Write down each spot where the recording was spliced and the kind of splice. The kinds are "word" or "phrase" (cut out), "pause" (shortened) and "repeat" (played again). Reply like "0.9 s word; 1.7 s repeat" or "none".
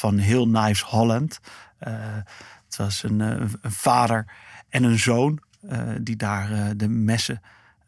none